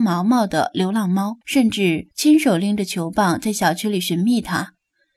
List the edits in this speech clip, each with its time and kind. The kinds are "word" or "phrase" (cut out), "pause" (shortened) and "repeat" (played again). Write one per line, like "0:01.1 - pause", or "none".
0:01.4 - pause
0:02.1 - pause